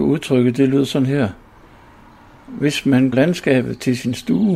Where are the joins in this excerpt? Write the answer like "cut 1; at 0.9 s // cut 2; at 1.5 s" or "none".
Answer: cut 1; at 3.1 s